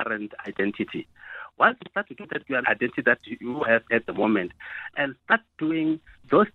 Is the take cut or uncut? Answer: cut